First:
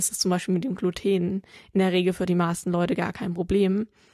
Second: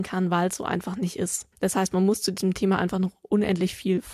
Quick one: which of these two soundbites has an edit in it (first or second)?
second